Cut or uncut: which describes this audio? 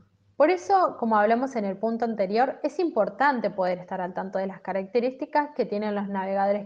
uncut